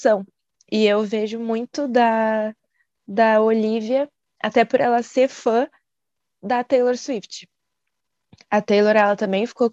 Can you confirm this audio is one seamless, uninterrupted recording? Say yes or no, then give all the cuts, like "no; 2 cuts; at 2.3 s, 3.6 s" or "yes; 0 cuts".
yes; 0 cuts